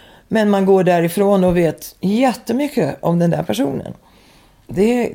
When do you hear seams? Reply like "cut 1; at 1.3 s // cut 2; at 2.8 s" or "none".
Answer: none